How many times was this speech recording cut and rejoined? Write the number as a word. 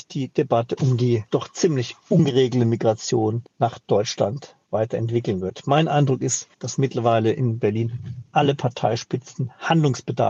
one